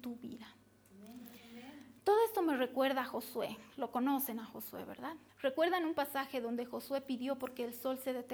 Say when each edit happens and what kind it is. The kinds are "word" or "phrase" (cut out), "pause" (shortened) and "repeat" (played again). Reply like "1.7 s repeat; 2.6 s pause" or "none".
2.0 s pause; 5.3 s pause